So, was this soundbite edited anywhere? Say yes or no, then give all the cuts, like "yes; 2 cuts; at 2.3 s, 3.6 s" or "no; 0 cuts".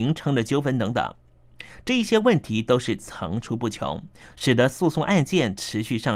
no; 0 cuts